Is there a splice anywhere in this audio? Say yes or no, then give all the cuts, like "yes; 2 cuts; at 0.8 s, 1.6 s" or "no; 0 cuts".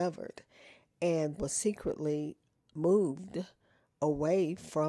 yes; 1 cut; at 1.4 s